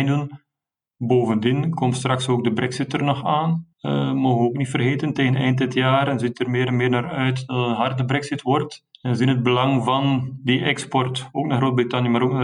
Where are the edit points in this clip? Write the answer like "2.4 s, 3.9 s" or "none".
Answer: 3.7 s, 8.9 s